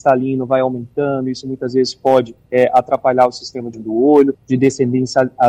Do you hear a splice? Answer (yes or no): yes